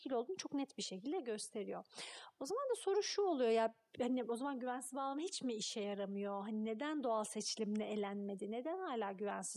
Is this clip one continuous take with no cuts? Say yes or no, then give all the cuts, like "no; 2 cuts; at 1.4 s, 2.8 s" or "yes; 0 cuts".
yes; 0 cuts